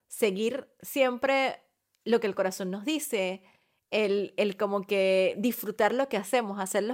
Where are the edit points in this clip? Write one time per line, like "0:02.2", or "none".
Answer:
none